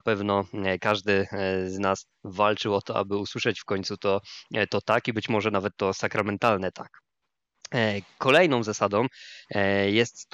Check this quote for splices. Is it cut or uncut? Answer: uncut